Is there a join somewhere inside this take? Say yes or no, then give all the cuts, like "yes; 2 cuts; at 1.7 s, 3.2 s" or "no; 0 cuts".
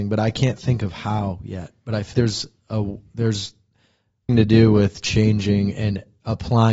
yes; 2 cuts; at 2.1 s, 4.3 s